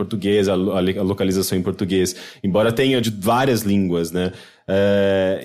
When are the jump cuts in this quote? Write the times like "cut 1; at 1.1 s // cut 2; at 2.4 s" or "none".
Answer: cut 1; at 3.0 s